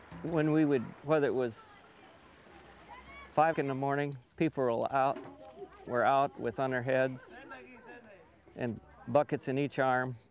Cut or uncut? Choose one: cut